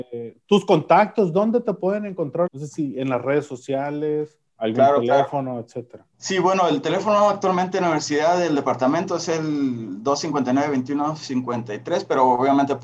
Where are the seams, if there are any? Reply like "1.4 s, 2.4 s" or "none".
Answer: 2.5 s, 4.5 s, 6.1 s